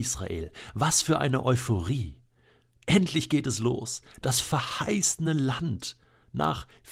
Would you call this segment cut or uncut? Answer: uncut